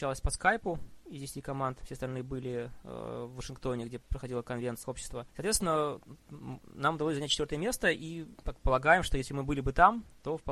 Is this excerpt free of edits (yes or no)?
no